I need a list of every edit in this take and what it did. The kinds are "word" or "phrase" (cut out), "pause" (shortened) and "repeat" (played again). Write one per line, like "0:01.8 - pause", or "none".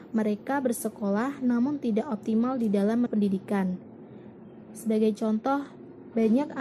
0:03.1 - word